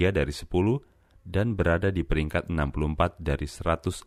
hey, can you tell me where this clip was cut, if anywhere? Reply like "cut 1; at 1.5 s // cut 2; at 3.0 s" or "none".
none